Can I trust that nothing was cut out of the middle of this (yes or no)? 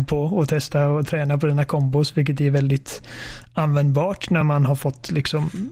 yes